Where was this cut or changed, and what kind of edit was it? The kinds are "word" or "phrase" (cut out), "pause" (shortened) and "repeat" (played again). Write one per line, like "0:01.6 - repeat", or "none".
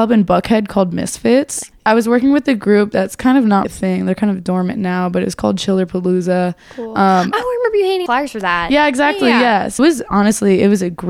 0:03.6 - word
0:08.1 - word
0:09.8 - word